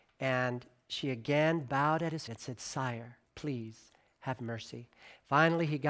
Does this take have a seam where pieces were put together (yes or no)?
yes